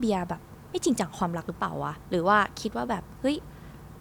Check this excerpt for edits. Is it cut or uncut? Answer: cut